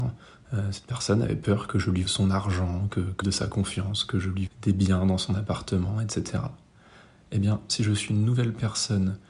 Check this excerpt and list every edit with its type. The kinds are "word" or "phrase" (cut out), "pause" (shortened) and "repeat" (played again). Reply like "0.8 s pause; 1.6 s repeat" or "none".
2.0 s word; 3.2 s word; 4.5 s word; 7.7 s word; 8.1 s word